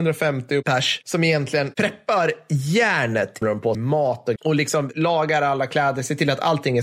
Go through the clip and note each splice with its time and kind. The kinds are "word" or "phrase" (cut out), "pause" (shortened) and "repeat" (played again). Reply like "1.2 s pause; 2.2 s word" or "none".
3.4 s phrase; 3.7 s word; 4.4 s word